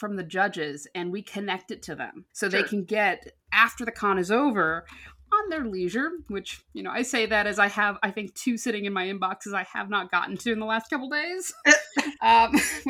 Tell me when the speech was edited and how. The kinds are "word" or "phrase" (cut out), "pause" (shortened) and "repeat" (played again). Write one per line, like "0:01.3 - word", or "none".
0:02.3 - pause